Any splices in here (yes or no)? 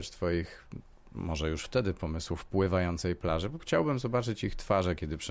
yes